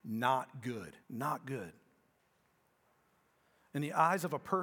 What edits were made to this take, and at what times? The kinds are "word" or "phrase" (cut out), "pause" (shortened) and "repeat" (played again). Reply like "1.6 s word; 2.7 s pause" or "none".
1.0 s pause